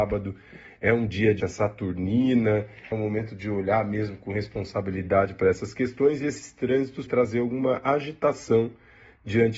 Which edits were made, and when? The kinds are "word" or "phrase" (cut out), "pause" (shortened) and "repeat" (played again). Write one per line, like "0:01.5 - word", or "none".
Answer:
0:01.4 - word
0:02.9 - word
0:07.1 - word